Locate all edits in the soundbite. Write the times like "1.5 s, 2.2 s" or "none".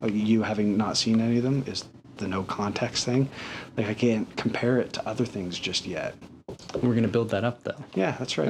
none